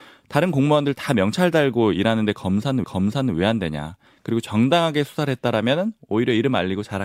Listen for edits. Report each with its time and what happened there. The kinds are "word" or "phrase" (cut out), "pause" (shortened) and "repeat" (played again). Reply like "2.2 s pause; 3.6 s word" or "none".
2.8 s repeat